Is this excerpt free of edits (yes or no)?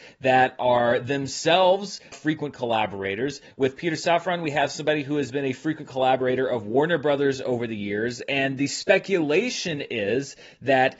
no